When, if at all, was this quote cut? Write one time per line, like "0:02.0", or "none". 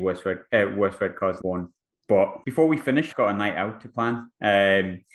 0:01.4
0:01.9
0:03.1